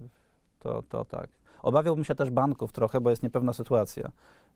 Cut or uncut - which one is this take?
uncut